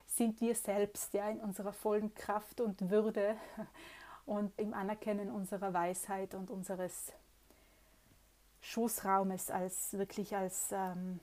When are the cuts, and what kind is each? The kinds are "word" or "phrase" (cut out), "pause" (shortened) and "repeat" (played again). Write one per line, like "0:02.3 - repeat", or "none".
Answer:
0:04.6 - word